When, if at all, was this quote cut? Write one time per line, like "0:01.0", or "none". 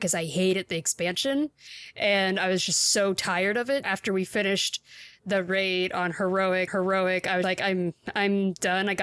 0:03.8
0:06.7
0:07.4